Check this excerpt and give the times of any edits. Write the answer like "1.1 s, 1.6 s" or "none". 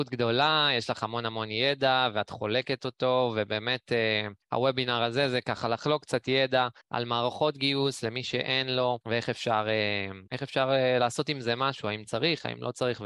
4.4 s, 6.8 s, 9.0 s, 10.3 s

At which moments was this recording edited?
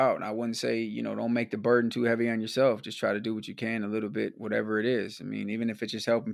none

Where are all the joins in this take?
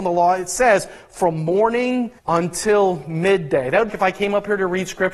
2.2 s, 3.9 s

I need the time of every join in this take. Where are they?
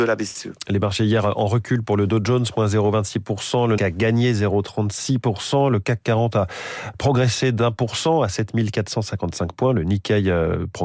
1.0 s, 3.8 s

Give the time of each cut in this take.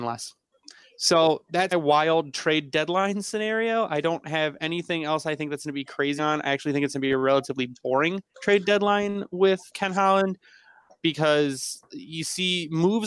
1.7 s, 6.2 s, 8.3 s, 9.7 s

